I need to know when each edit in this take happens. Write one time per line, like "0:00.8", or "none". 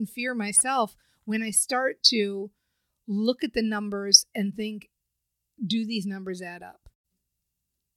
none